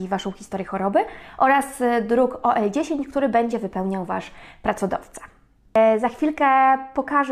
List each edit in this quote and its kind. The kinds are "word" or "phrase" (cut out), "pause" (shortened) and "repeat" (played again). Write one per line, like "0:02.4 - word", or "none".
none